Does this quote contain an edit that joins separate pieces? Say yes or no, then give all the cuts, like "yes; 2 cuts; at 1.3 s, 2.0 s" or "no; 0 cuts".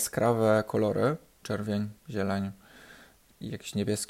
yes; 1 cut; at 1.4 s